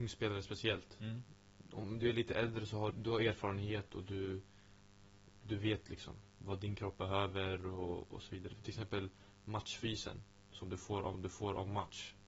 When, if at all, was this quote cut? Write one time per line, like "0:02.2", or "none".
0:02.9
0:11.1